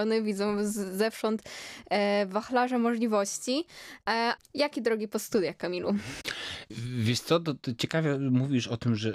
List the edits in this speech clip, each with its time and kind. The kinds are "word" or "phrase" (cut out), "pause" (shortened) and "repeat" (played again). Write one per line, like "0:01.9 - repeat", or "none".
0:04.4 - word